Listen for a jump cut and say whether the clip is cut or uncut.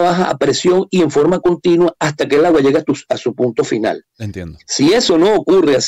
uncut